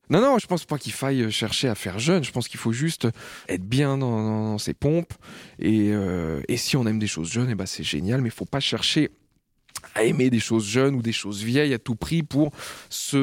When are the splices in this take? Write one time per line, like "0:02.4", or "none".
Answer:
0:03.5

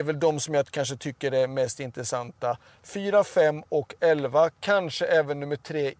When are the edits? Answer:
none

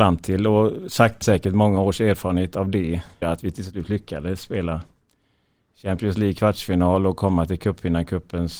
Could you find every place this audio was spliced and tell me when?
0:01.2
0:03.2

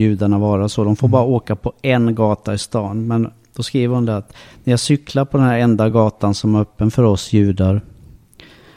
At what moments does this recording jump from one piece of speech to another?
none

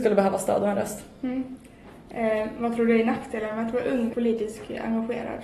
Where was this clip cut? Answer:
0:04.1

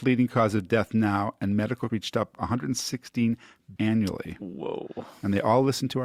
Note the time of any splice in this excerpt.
0:01.9
0:02.4
0:03.8

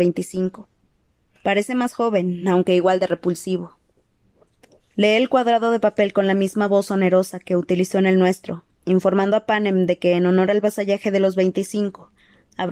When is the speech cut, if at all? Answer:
none

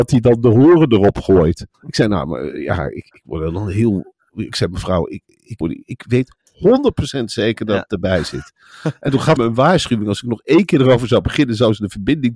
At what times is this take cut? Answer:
0:01.7
0:05.6
0:09.4

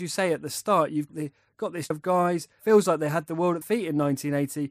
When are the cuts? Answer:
0:01.1
0:01.9
0:03.6

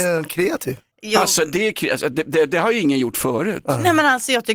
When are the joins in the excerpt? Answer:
none

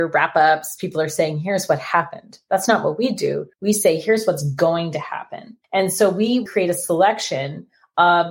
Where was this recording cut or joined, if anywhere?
0:03.5
0:05.6
0:06.5

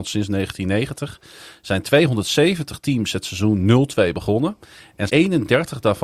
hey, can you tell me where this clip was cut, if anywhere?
0:05.1

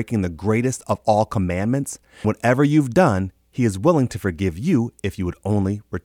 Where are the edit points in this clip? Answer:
0:02.2

